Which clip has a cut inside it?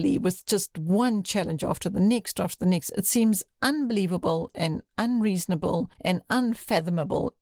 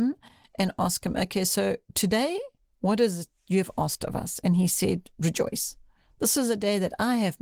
first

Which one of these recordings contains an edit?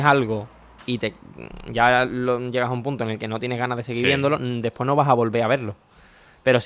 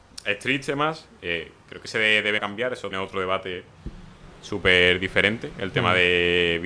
second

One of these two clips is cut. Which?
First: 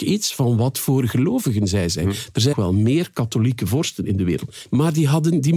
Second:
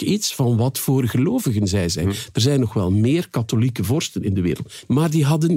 first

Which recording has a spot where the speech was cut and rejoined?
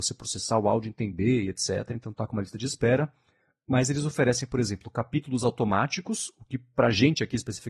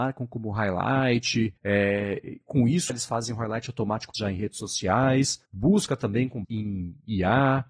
second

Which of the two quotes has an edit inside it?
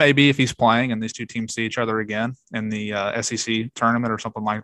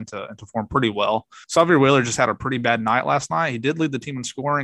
second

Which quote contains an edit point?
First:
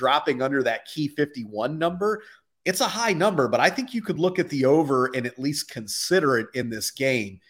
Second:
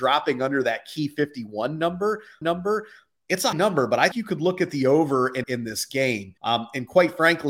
second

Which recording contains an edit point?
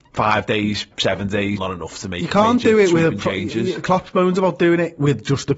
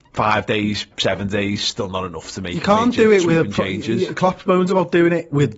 first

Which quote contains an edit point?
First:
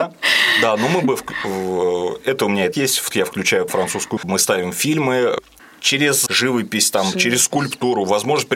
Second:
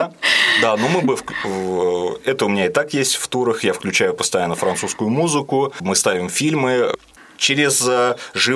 first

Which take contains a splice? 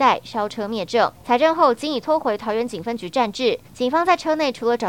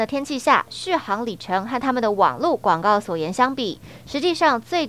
first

